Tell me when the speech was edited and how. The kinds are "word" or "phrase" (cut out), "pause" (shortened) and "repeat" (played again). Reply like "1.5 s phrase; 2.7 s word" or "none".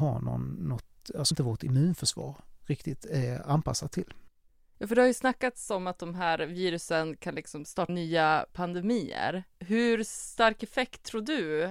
1.3 s word; 7.9 s word; 9.5 s pause